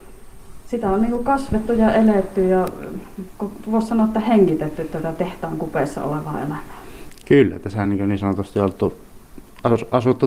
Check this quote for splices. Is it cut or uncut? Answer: uncut